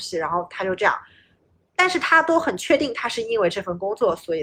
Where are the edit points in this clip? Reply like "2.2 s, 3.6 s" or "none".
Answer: 1.4 s